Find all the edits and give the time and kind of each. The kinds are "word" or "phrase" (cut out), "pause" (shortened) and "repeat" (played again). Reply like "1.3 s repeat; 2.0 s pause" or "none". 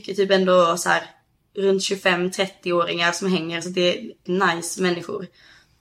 4.3 s phrase